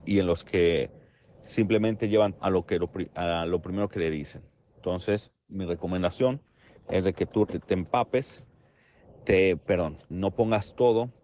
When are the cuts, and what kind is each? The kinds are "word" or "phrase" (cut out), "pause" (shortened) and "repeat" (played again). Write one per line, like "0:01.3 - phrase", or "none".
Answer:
0:02.4 - word
0:07.4 - word
0:10.1 - word